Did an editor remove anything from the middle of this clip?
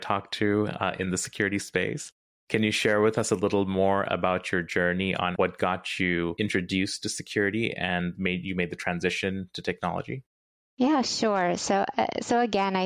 no; 0 cuts

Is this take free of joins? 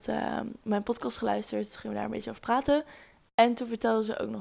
yes; 0 cuts

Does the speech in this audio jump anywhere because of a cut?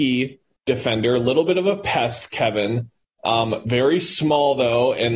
no; 0 cuts

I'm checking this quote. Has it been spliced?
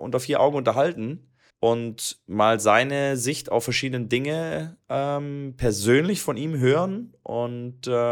yes; 1 cut; at 1.5 s

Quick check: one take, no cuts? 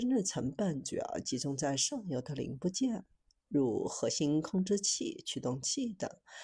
yes; 0 cuts

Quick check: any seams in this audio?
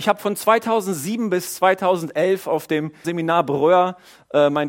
yes; 1 cut; at 3.0 s

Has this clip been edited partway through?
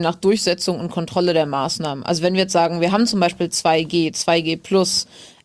no; 0 cuts

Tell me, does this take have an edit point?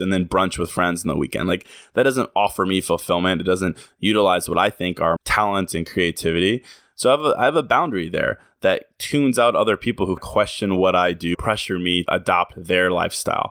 yes; 4 cuts; at 5.2 s, 10.2 s, 11.3 s, 12.1 s

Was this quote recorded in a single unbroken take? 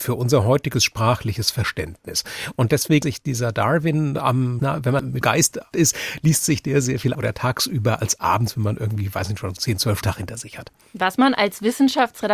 no; 7 cuts; at 3.0 s, 4.6 s, 5.2 s, 5.7 s, 7.1 s, 9.6 s, 10.0 s

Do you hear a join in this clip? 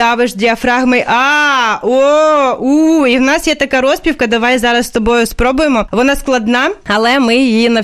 no; 0 cuts

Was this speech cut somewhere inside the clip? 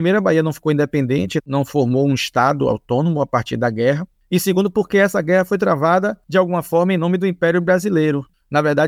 no; 0 cuts

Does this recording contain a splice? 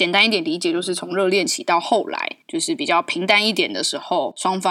yes; 1 cut; at 2.4 s

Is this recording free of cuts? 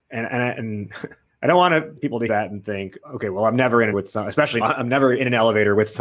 no; 6 cuts; at 1.3 s, 2.0 s, 2.3 s, 3.0 s, 3.9 s, 4.6 s

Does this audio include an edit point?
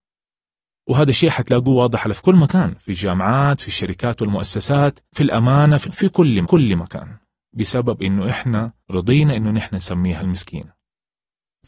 yes; 6 cuts; at 2.1 s, 3.6 s, 5.1 s, 5.8 s, 6.4 s, 8.8 s

